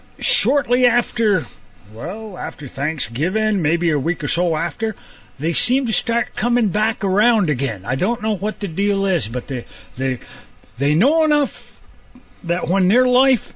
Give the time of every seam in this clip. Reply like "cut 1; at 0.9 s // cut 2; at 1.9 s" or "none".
none